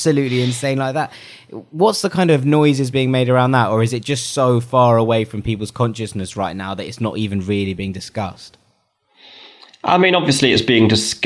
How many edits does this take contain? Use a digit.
0